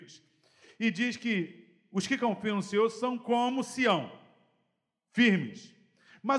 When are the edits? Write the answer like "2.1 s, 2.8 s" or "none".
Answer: none